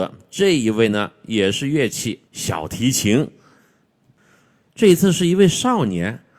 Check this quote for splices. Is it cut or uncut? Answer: cut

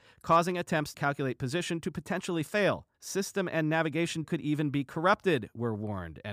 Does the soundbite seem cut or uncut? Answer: cut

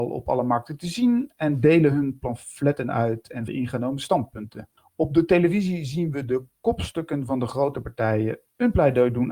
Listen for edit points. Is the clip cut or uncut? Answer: cut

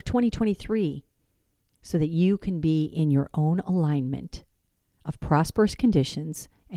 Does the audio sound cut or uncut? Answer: uncut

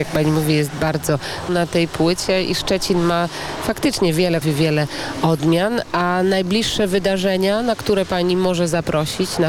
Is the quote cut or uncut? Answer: cut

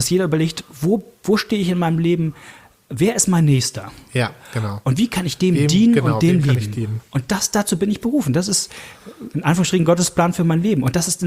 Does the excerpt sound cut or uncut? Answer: uncut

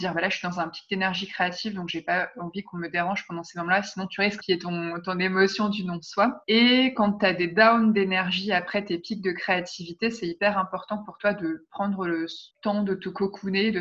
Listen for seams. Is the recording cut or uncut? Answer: cut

